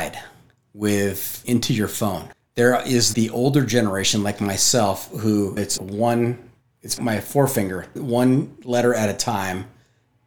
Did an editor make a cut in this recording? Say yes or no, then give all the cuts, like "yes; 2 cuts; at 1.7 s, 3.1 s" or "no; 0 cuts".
yes; 4 cuts; at 1.4 s, 2.3 s, 3.1 s, 5.8 s